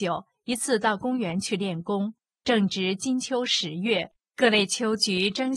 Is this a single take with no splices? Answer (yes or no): yes